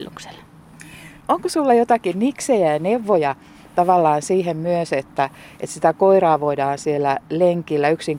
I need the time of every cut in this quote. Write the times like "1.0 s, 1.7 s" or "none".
none